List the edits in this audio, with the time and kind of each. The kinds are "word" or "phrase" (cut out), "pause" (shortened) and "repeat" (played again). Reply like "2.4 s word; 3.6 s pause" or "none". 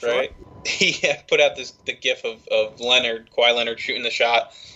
none